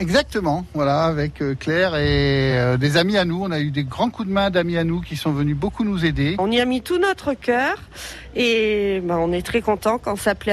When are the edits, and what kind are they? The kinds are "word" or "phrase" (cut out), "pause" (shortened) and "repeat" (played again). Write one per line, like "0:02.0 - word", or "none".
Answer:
none

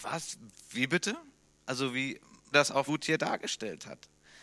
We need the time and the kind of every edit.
0:02.5 - word
0:02.9 - word

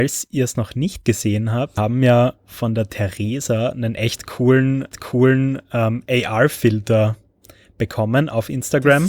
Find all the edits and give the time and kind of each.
0:01.8 - word
0:04.9 - repeat

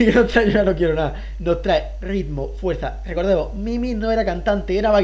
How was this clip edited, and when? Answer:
none

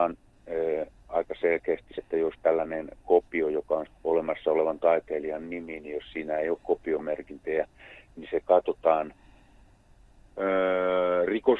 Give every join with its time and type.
0:02.0 - word
0:03.9 - word
0:04.8 - word

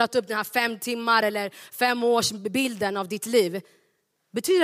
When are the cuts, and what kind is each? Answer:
none

